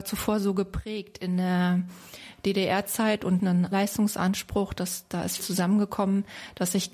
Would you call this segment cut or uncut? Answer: cut